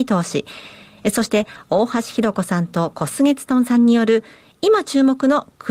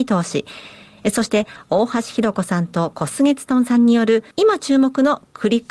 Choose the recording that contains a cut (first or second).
second